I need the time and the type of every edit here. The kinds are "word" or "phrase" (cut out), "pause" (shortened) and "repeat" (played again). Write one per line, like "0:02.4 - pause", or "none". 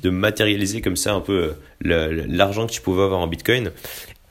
0:01.6 - pause